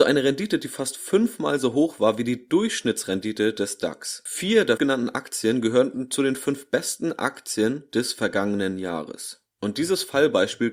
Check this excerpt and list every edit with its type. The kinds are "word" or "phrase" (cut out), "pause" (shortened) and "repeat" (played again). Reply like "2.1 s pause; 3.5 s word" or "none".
4.8 s word

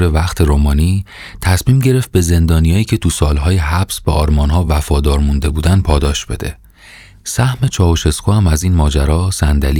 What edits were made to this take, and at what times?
none

